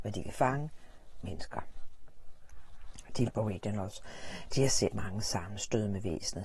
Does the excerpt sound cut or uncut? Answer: cut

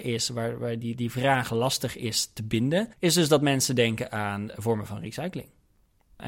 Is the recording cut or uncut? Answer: cut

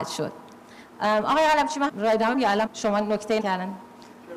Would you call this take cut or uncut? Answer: cut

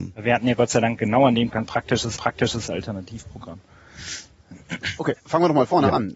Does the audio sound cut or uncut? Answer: cut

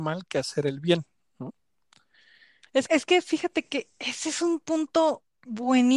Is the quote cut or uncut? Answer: cut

